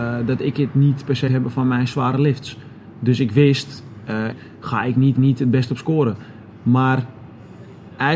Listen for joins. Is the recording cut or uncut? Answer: cut